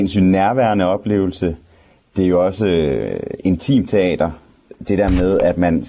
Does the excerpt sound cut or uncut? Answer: uncut